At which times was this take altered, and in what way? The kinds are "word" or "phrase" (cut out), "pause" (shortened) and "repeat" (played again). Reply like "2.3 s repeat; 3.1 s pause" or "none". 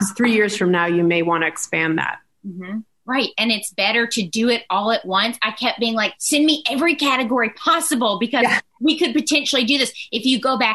6.2 s word